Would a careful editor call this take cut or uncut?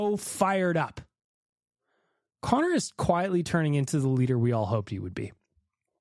uncut